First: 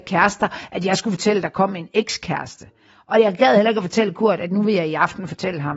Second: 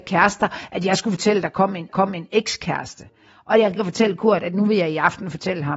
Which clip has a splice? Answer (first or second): second